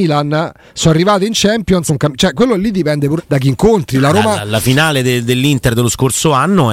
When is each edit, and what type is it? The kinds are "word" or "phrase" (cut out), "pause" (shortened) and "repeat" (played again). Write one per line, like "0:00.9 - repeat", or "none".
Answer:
0:01.9 - word
0:03.2 - word